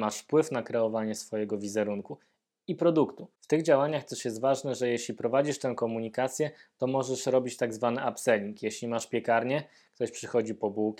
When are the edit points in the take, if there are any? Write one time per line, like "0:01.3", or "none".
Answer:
none